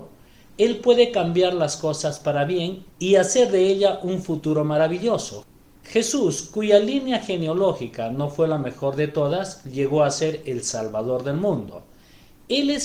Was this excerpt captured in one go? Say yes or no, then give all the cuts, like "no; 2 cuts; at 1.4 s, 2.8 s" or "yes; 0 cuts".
yes; 0 cuts